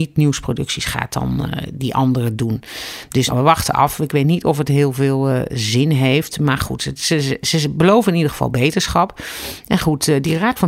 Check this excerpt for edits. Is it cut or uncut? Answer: cut